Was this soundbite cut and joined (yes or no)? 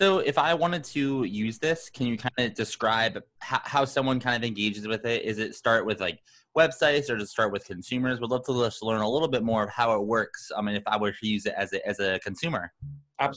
no